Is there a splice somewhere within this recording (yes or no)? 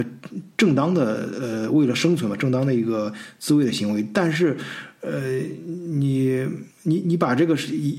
yes